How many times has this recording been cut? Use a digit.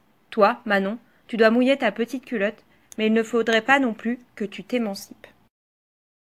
0